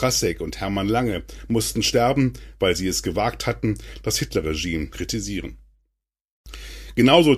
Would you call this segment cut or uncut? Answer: cut